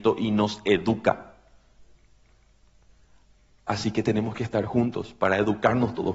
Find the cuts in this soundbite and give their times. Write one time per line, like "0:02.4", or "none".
none